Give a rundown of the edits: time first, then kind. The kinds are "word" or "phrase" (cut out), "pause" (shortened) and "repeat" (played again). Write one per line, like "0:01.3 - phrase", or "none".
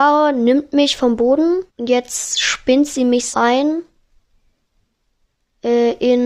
0:01.7 - pause
0:03.3 - word